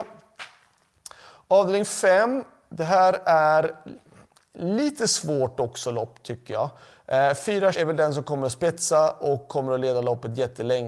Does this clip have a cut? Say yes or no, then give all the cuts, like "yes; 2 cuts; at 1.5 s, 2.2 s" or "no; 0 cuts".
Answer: yes; 1 cut; at 7.7 s